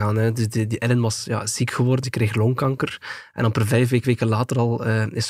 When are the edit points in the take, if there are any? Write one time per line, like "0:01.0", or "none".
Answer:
0:02.0
0:04.0